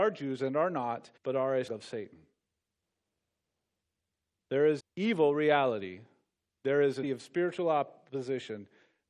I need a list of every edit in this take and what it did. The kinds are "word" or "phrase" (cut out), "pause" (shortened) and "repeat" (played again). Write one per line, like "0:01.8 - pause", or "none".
0:01.2 - pause
0:01.7 - word
0:04.8 - word
0:07.0 - word